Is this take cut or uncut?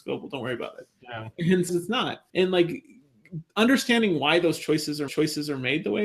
cut